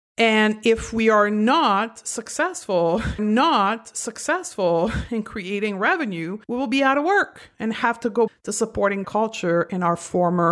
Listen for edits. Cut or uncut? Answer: cut